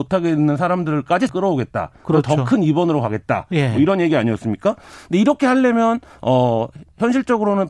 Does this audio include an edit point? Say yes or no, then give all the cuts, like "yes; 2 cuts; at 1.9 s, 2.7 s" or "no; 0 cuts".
yes; 1 cut; at 1.3 s